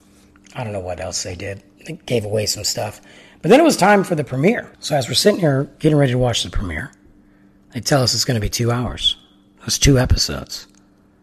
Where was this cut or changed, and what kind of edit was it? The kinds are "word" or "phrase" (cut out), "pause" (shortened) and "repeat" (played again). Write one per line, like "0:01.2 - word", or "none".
0:04.7 - pause